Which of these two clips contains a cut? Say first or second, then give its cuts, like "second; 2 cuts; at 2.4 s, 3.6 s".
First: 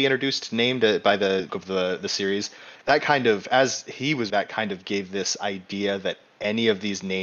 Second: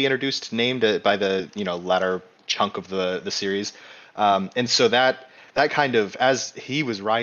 first; 3 cuts; at 1.5 s, 2.7 s, 4.3 s